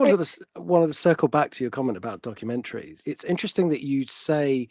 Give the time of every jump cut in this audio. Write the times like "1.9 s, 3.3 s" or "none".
none